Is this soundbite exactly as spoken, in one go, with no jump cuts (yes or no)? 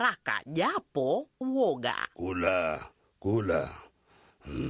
no